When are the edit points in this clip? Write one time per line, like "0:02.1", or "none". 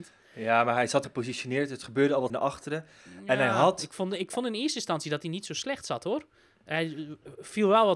0:01.0
0:02.3